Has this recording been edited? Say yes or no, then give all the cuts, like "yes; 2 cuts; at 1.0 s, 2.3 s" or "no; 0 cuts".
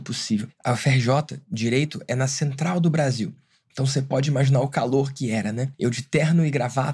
no; 0 cuts